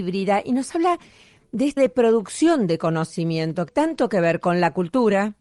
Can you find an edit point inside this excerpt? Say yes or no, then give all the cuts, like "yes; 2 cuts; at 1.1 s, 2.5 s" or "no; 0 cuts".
yes; 2 cuts; at 1.8 s, 3.7 s